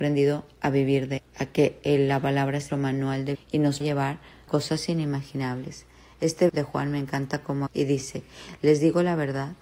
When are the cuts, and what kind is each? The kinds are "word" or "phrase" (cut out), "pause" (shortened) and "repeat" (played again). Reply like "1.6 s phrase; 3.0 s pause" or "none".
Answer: 1.2 s word; 2.7 s word; 3.3 s word; 3.8 s word; 4.5 s word; 6.5 s word; 7.7 s word